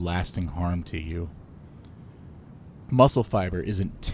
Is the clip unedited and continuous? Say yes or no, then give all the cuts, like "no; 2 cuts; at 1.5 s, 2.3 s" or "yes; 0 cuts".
no; 1 cut; at 2.9 s